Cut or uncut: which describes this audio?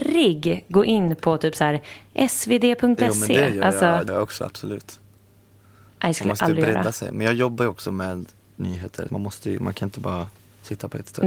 cut